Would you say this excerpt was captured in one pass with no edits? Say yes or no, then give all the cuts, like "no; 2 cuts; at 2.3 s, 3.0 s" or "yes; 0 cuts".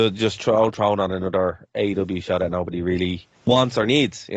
no; 1 cut; at 3.4 s